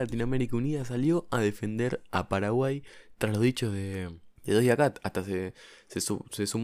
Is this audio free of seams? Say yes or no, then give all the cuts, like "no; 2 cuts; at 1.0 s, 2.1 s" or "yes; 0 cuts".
no; 1 cut; at 4.4 s